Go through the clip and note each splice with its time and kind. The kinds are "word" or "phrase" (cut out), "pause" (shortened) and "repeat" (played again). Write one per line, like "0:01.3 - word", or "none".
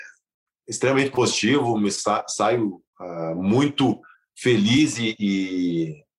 0:02.9 - pause
0:04.1 - pause